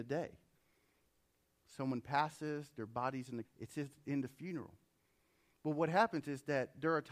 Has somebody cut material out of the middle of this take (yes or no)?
yes